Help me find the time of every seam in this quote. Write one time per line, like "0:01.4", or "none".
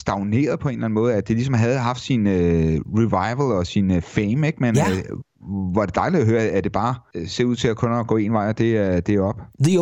none